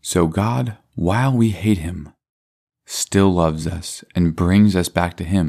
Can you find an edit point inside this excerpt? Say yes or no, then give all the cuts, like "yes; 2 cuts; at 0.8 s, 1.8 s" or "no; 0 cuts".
no; 0 cuts